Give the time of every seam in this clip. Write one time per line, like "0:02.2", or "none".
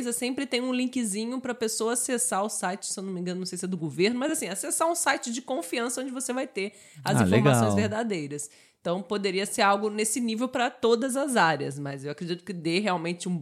none